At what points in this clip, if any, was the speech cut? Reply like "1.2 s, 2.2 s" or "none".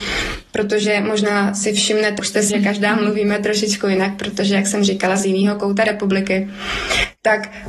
2.2 s, 2.5 s, 5.2 s

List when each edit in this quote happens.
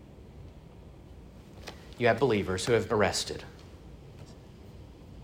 2.2 s, 2.9 s

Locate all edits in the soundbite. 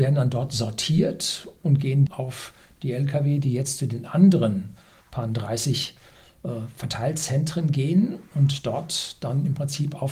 2.1 s

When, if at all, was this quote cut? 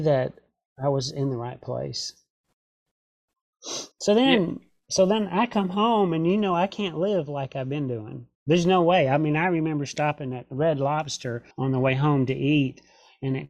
3.9 s, 8.3 s, 11.5 s

